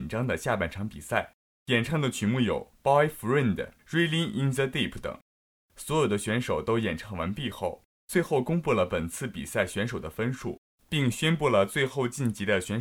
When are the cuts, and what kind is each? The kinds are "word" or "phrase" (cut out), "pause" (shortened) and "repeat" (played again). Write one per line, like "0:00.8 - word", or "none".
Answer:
0:03.8 - pause